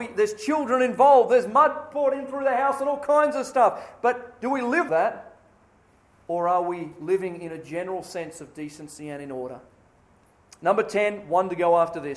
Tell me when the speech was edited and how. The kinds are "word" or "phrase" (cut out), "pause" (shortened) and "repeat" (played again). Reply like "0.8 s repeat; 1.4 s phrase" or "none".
4.9 s word